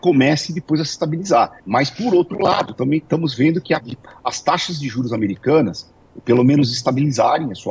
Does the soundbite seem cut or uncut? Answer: cut